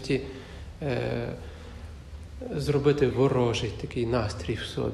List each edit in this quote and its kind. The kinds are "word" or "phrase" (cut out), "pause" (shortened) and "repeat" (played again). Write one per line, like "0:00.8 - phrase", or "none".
0:03.1 - word